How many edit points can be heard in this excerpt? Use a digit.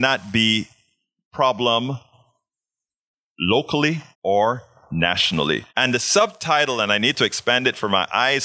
2